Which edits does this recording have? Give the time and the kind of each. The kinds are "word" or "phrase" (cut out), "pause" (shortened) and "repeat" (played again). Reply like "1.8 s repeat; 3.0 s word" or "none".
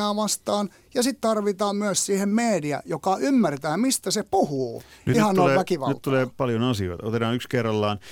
5.1 s phrase; 6.3 s word